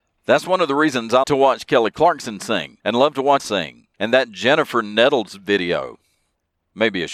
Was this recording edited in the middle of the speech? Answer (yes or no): yes